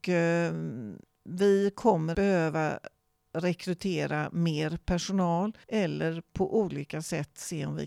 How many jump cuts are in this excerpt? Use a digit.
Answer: 3